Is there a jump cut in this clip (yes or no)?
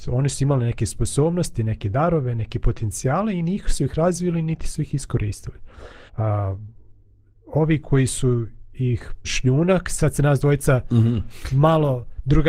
yes